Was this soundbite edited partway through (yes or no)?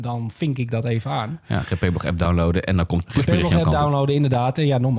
no